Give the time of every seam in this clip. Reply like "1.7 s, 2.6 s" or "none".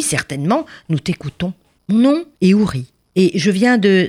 none